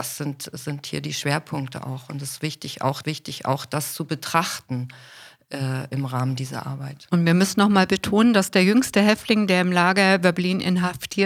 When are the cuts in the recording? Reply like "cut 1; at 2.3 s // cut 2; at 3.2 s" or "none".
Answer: cut 1; at 3.0 s